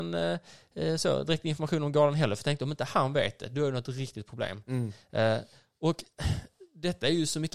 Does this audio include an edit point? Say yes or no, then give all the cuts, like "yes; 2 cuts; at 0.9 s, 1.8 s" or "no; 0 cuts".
no; 0 cuts